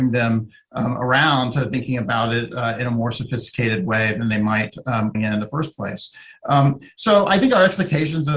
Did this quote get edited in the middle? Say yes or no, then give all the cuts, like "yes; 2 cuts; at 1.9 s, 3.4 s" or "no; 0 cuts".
yes; 1 cut; at 5.1 s